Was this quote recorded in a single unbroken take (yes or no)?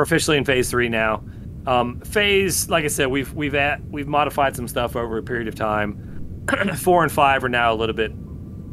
yes